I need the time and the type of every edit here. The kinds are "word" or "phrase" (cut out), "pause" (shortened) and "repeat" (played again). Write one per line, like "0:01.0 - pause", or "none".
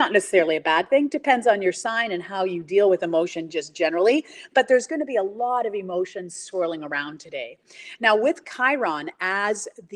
none